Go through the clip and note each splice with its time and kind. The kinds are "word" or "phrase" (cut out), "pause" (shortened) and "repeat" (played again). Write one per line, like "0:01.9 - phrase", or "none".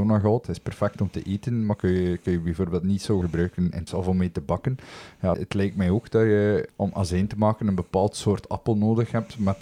0:03.2 - word
0:03.9 - word
0:05.3 - word
0:06.7 - word